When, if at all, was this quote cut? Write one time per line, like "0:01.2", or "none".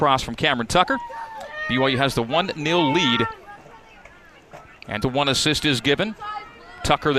0:05.0